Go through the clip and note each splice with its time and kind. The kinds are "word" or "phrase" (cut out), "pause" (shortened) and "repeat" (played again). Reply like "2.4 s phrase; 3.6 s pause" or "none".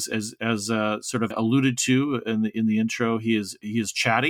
1.3 s word